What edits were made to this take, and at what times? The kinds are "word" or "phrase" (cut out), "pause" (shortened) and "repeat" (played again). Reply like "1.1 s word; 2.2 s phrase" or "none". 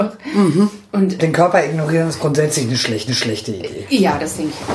1.2 s phrase; 3.1 s repeat